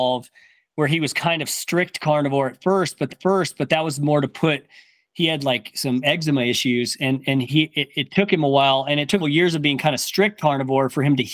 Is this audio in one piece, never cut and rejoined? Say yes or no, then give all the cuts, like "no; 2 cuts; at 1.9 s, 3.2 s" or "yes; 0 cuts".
no; 3 cuts; at 3.1 s, 7.4 s, 9.2 s